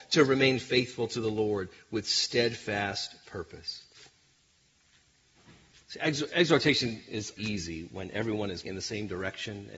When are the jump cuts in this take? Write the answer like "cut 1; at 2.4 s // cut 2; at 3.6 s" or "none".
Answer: cut 1; at 7.4 s // cut 2; at 8.6 s